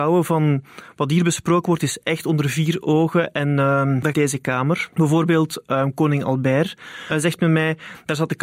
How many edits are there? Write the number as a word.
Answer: three